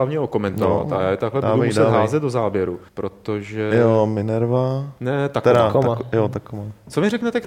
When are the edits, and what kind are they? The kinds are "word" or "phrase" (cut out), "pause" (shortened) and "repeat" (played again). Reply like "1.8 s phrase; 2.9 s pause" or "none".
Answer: 2.9 s pause